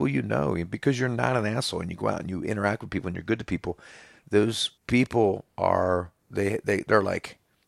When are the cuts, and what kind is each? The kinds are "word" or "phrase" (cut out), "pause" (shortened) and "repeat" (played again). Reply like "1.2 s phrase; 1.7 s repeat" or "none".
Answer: 4.8 s pause; 6.2 s pause